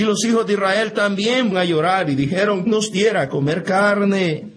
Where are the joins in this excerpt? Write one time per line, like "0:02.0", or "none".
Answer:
0:01.5
0:02.7